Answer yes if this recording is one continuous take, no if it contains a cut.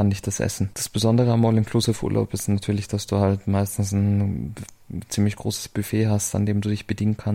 yes